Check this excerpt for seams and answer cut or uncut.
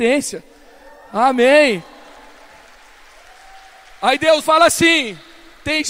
cut